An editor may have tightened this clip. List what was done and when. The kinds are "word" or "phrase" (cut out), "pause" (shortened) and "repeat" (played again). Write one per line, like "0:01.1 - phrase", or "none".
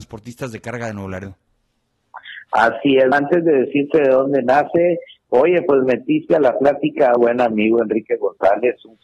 0:03.1 - word
0:07.2 - phrase